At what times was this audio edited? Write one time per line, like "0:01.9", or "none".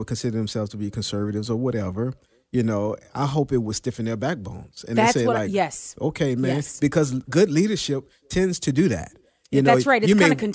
none

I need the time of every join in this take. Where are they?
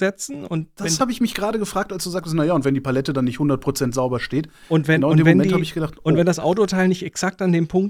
0:01.0

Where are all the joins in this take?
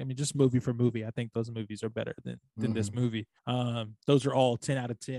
0:03.4

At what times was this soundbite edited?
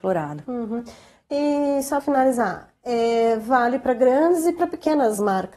0:02.0

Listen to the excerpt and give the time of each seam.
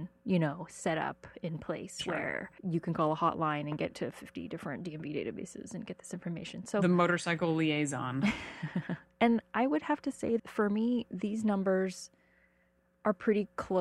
0:02.6
0:03.9
0:10.4

